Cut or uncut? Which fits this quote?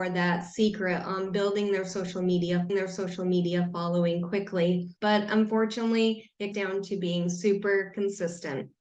cut